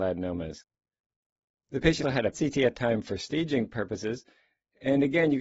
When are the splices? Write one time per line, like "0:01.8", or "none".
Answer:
0:02.0
0:02.3
0:02.7